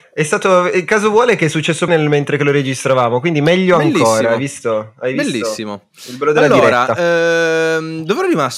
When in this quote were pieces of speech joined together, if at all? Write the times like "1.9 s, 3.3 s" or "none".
1.9 s